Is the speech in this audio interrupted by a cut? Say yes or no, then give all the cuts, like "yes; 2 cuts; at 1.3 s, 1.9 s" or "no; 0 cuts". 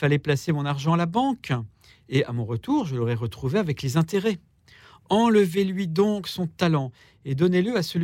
no; 0 cuts